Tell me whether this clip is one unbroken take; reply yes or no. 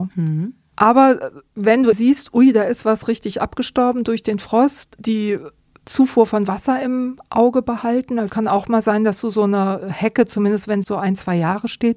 no